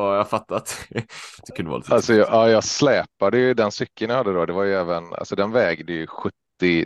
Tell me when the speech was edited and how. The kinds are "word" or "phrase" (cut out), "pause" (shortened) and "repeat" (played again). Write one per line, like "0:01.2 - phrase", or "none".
0:01.4 - pause